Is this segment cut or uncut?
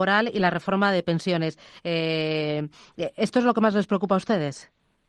uncut